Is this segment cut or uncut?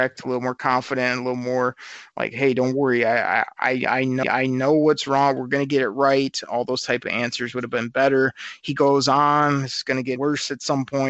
cut